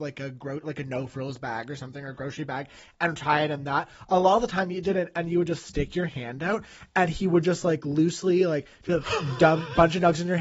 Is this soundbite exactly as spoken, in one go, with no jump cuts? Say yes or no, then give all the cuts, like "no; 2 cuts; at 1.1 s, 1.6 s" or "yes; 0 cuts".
yes; 0 cuts